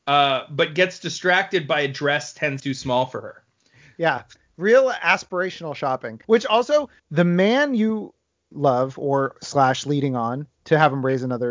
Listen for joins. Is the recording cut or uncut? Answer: cut